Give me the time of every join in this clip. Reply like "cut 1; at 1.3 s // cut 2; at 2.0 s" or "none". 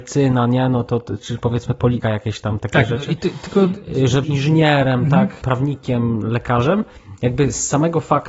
cut 1; at 1.2 s // cut 2; at 2.0 s // cut 3; at 2.6 s // cut 4; at 4.2 s // cut 5; at 5.4 s